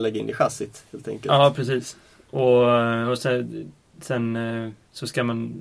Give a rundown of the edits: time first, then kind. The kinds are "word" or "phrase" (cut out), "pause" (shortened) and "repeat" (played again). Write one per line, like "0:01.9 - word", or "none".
none